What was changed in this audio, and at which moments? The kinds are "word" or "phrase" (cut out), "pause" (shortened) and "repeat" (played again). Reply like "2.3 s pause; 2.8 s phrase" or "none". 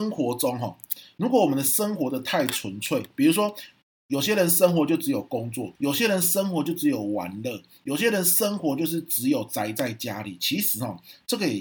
5.7 s pause